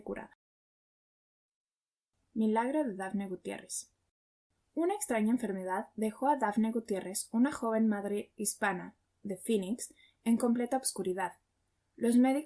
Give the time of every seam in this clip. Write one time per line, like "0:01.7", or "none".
none